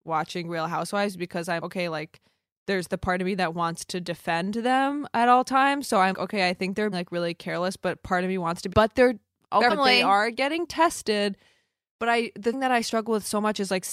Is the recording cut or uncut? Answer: cut